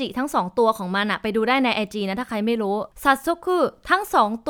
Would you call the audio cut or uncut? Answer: uncut